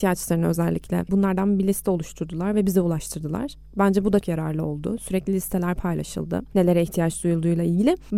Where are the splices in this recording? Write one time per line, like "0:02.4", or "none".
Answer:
0:01.1
0:04.2